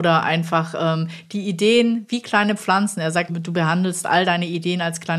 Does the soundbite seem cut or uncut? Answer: cut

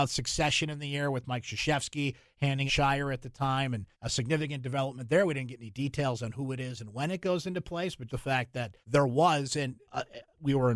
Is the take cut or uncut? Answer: cut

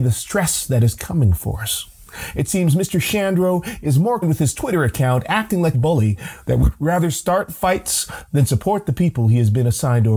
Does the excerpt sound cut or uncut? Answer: cut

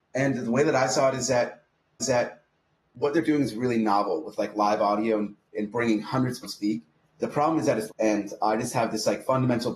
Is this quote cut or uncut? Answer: cut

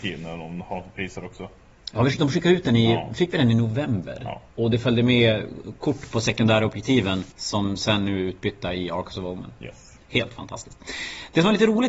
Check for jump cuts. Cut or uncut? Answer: cut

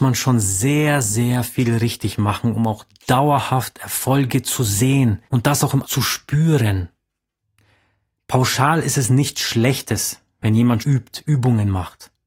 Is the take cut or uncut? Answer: cut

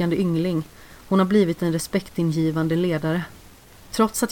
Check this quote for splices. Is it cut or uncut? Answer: uncut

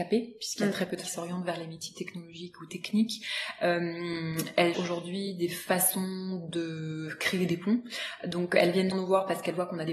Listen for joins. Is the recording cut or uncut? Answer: cut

